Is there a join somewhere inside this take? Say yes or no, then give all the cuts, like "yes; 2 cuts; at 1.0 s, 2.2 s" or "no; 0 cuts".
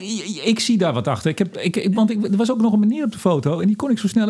no; 0 cuts